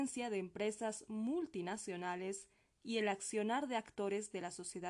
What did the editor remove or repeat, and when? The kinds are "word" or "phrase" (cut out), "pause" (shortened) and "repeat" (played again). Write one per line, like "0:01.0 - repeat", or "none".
none